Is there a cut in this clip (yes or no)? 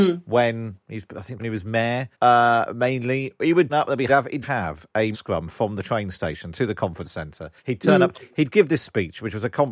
yes